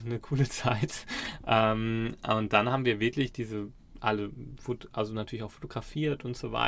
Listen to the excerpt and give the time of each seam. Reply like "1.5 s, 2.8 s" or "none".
none

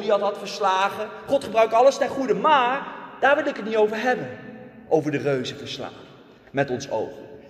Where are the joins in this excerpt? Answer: none

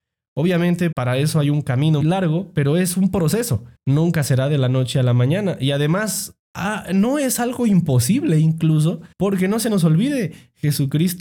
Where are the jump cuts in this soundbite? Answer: 0.9 s, 2.0 s, 3.8 s, 9.1 s

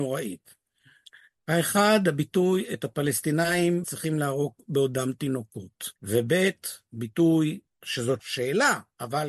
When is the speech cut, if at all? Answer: 3.8 s, 6.0 s, 8.2 s

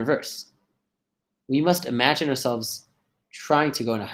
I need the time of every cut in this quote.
none

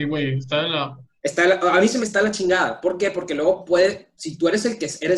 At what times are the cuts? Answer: 2.0 s, 4.1 s

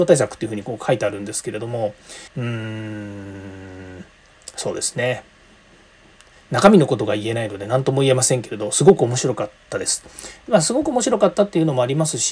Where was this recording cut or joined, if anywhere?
2.3 s

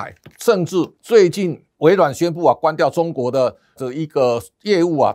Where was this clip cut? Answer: 3.8 s

